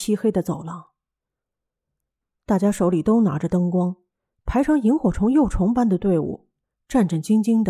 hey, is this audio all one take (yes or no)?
yes